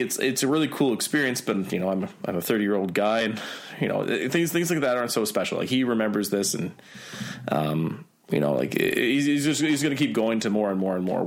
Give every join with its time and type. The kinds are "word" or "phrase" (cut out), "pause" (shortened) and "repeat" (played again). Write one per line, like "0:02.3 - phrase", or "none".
none

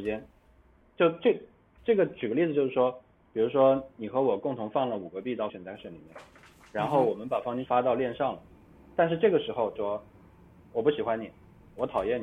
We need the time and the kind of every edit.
0:05.5 - word
0:07.7 - word
0:09.8 - word

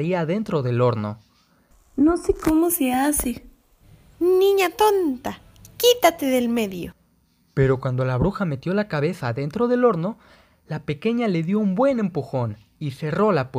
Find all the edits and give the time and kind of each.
none

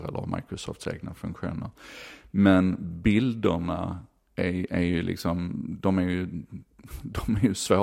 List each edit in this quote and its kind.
none

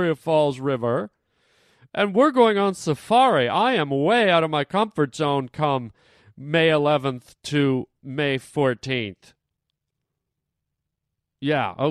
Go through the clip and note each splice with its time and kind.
none

